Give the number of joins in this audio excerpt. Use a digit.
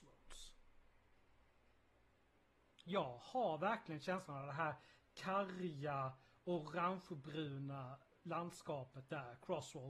0